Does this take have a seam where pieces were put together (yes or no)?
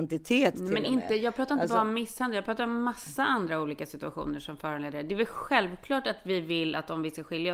no